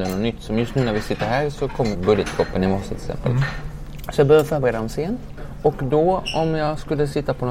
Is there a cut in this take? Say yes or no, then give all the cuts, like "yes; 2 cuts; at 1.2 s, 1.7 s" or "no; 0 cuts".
yes; 1 cut; at 1.9 s